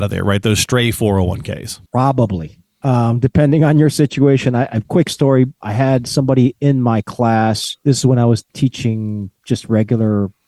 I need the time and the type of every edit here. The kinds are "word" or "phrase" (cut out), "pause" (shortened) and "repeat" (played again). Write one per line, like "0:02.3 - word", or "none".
0:01.9 - pause
0:04.8 - phrase
0:07.8 - pause
0:08.5 - word